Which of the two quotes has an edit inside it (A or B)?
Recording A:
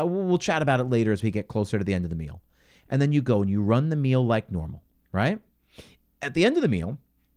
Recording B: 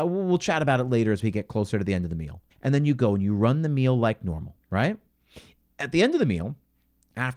B